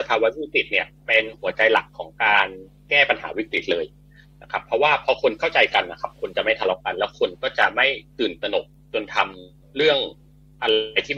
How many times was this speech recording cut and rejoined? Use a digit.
1